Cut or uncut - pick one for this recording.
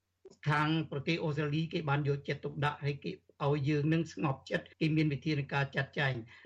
cut